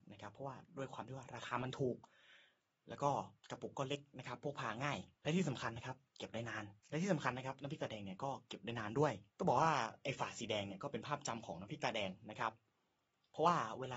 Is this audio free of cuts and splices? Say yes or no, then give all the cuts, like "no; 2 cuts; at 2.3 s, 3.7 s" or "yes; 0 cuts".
no; 4 cuts; at 3.4 s, 5.1 s, 6.8 s, 9.3 s